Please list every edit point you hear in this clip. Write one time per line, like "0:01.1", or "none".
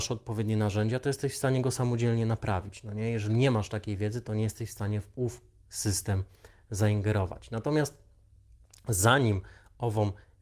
none

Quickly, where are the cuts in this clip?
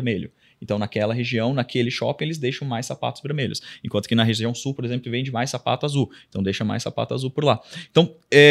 none

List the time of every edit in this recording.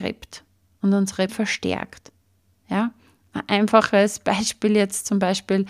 0:01.3

